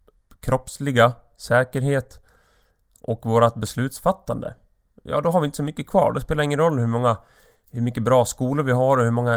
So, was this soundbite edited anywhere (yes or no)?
no